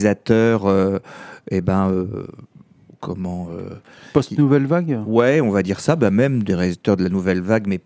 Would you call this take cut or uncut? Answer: uncut